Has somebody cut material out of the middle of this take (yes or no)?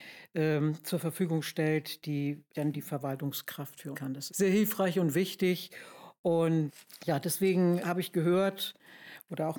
yes